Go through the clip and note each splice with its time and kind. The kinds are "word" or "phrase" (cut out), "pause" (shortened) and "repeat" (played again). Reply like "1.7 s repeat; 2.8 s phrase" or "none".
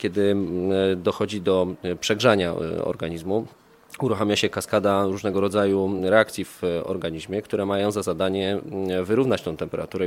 none